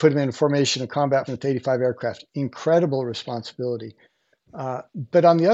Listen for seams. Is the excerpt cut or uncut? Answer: cut